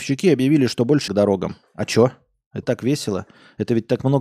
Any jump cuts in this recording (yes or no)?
yes